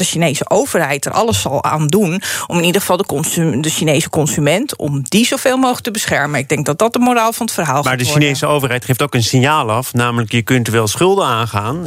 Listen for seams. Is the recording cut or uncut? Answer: uncut